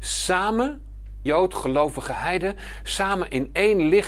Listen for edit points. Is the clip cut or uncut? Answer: cut